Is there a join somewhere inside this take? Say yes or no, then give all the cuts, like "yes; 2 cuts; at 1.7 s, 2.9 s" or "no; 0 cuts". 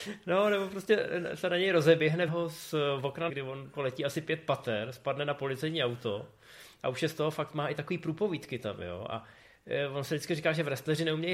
yes; 3 cuts; at 2.3 s, 3.3 s, 3.7 s